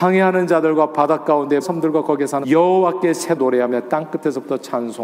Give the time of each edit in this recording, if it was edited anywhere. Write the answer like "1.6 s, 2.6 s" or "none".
1.6 s, 2.4 s, 3.4 s